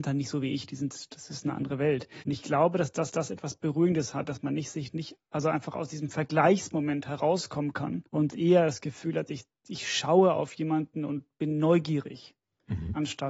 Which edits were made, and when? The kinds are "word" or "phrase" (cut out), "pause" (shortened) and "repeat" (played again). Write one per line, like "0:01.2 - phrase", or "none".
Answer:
0:02.2 - pause
0:03.1 - repeat
0:08.1 - pause